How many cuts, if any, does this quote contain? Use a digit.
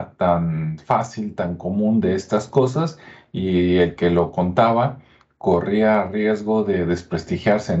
0